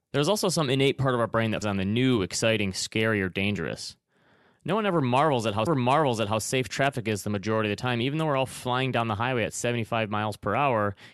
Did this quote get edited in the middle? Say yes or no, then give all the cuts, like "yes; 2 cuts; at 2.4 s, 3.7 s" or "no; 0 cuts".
yes; 2 cuts; at 1.6 s, 5.7 s